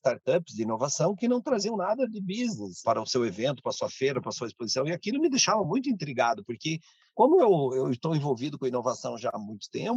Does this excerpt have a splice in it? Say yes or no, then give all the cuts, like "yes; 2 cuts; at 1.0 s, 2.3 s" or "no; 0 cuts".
no; 0 cuts